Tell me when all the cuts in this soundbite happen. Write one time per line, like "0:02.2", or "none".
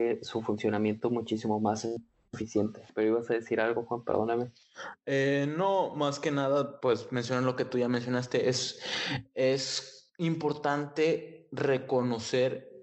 0:02.9